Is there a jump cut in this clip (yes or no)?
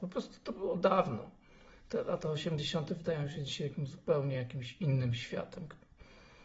no